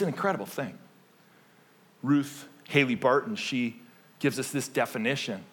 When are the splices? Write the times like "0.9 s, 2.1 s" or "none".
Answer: none